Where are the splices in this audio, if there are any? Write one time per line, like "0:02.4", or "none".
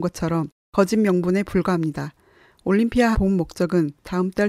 0:03.1